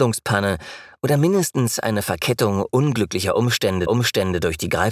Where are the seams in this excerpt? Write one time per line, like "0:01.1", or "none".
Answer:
0:03.9